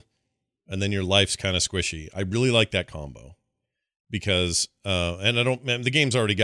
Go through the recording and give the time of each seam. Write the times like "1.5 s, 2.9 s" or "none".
none

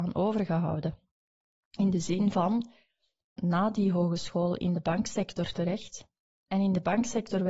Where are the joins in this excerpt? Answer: 3.4 s

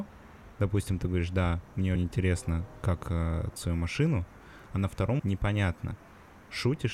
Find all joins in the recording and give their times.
2.0 s, 3.6 s, 5.2 s

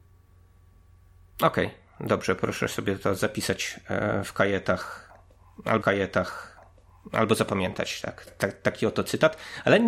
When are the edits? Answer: 5.8 s, 8.3 s

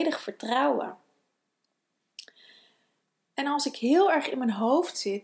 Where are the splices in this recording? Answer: none

